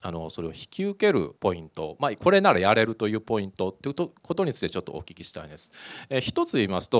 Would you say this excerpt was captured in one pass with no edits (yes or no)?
no